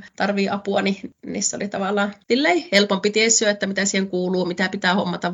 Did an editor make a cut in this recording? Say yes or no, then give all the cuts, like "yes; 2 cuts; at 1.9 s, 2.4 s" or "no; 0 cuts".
no; 0 cuts